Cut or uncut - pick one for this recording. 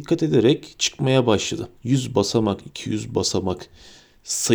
cut